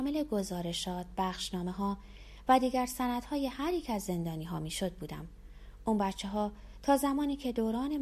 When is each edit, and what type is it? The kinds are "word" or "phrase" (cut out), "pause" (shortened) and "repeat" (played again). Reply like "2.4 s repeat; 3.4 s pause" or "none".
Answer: none